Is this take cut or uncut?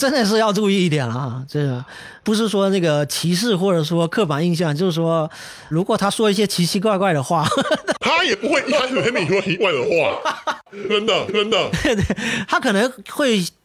cut